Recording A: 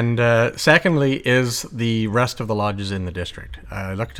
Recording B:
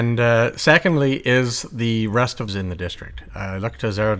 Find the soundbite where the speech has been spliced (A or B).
B